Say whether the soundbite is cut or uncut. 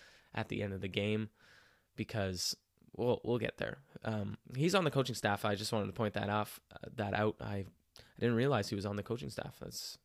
uncut